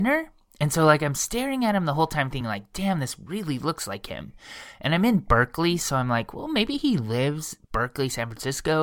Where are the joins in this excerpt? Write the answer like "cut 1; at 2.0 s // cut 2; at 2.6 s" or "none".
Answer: none